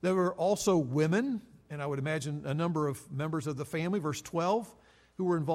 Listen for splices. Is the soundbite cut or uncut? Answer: uncut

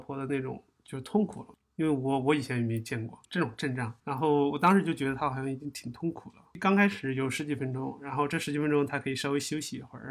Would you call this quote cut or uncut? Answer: uncut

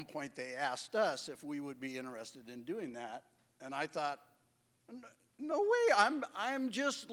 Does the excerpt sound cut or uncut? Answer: uncut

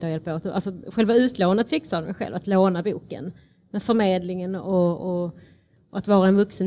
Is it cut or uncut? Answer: uncut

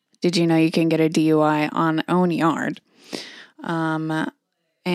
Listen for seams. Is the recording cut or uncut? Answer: cut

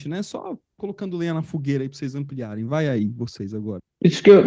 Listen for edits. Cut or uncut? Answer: uncut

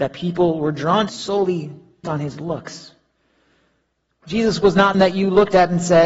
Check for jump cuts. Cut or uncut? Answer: cut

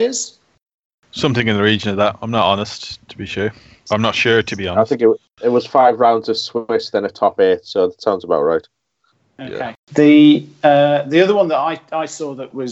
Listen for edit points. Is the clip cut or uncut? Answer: cut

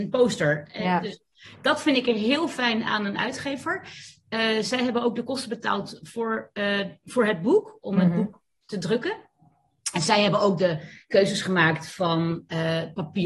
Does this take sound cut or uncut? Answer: uncut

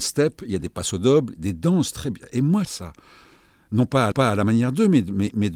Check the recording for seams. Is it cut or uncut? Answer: cut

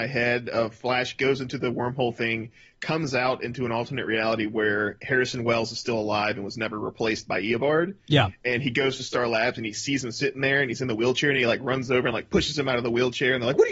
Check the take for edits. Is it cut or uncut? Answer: uncut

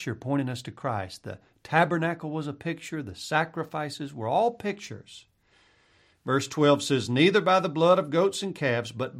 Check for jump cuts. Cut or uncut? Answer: uncut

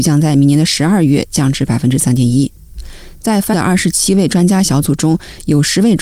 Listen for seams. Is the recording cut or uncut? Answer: cut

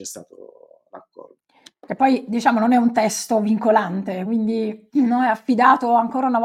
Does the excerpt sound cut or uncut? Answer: uncut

